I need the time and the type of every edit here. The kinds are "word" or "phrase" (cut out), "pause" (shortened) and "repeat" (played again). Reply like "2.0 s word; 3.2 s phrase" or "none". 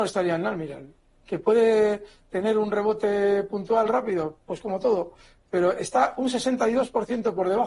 none

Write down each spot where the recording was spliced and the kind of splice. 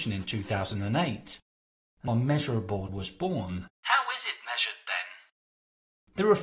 2.1 s phrase; 2.9 s word; 3.7 s pause

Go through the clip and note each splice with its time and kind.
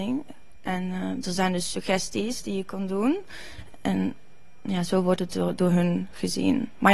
none

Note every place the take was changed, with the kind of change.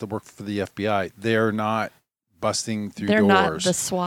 none

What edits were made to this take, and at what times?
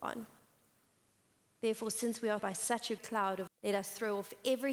2.4 s word; 3.0 s word; 3.5 s word

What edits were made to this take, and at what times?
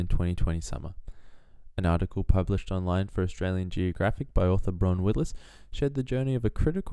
none

